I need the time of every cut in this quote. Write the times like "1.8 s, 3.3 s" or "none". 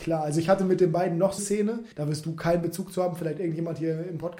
1.4 s, 1.9 s